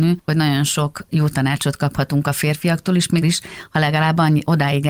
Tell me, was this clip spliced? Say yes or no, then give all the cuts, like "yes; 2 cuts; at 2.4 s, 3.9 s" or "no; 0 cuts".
yes; 1 cut; at 3.2 s